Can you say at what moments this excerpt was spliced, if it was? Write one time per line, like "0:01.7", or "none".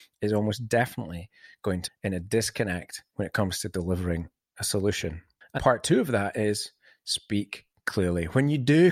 0:01.9
0:05.6